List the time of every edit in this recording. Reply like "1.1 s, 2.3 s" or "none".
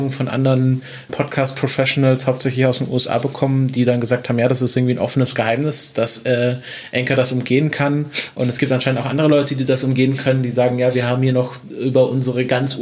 1.1 s